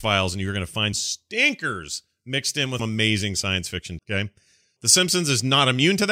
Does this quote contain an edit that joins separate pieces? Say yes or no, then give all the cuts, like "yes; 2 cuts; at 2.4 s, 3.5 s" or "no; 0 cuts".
yes; 4 cuts; at 0.9 s, 2.8 s, 4.0 s, 4.8 s